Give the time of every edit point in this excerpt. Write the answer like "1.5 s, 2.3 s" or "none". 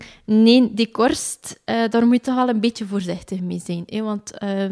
none